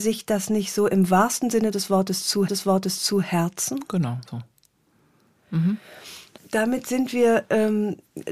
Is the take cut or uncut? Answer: cut